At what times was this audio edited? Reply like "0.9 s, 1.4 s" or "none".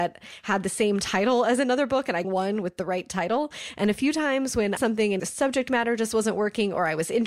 2.2 s, 4.8 s, 5.2 s